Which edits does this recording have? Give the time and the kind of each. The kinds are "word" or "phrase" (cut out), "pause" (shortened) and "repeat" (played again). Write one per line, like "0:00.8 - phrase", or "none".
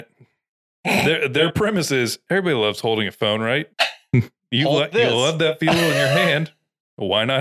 0:03.7 - pause